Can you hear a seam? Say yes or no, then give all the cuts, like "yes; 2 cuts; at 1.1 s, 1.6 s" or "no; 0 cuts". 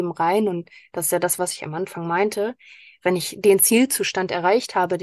no; 0 cuts